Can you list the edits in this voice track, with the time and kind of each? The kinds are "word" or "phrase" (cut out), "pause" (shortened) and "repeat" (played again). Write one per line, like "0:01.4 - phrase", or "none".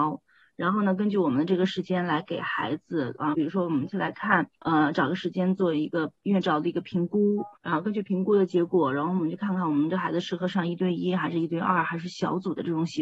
0:03.3 - word
0:04.5 - pause
0:06.2 - pause
0:07.6 - pause